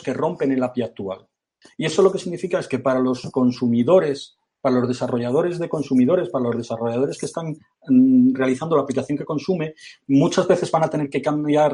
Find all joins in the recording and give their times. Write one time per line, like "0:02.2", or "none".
none